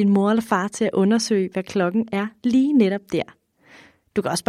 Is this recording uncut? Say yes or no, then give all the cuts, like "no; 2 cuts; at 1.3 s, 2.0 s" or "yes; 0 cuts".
yes; 0 cuts